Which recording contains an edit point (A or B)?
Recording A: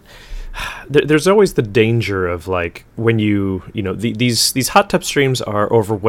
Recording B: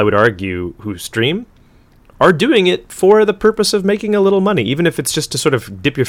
A